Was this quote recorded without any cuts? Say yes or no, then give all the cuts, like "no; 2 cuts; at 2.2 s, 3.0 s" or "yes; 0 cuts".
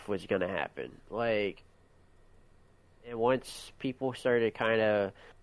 yes; 0 cuts